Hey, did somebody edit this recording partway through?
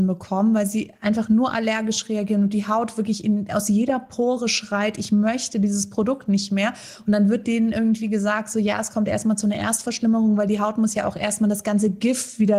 no; 0 cuts

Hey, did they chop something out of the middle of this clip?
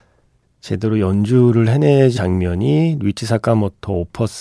yes; 1 cut; at 2.2 s

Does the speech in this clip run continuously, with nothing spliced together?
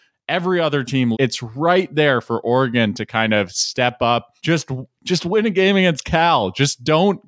no; 2 cuts; at 1.1 s, 4.4 s

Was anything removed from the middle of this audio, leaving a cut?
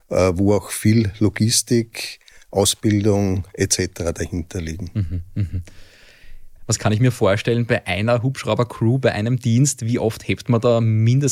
no; 0 cuts

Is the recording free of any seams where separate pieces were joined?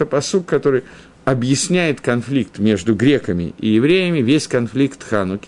yes; 0 cuts

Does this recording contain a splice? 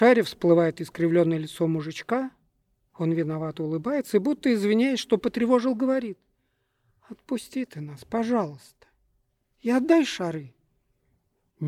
no; 0 cuts

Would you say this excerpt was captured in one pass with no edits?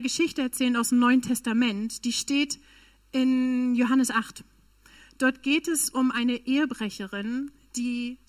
yes; 0 cuts

